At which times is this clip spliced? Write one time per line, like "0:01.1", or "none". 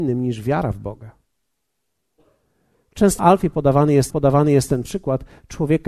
0:03.2
0:04.1